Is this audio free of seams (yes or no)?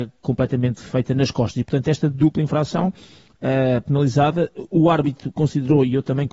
yes